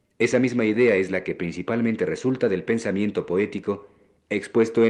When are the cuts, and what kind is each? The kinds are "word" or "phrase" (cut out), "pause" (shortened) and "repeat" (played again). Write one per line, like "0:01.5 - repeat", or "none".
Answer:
none

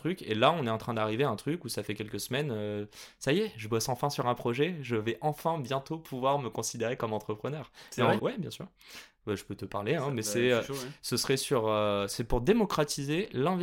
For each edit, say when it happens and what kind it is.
0:08.2 - word

